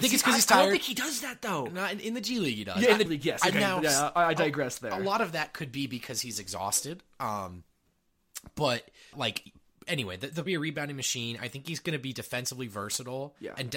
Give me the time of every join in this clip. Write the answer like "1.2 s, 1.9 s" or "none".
3.1 s, 9.1 s, 10.5 s